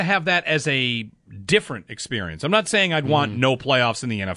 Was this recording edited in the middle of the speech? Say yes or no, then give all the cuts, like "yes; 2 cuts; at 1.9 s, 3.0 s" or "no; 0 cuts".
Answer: no; 0 cuts